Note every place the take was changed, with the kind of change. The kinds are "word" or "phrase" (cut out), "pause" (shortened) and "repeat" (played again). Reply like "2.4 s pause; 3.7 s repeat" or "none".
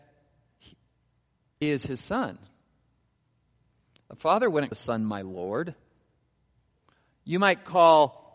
1.6 s word; 4.7 s word